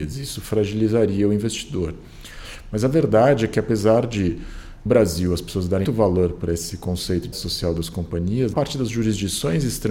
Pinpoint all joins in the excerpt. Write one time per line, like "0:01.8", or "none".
0:04.9
0:05.8
0:07.3
0:08.5